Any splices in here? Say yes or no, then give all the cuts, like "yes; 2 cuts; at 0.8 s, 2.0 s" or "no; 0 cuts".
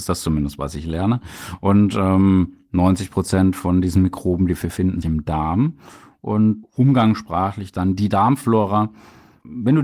yes; 2 cuts; at 5.0 s, 6.6 s